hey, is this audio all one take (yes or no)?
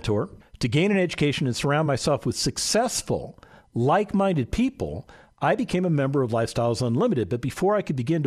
yes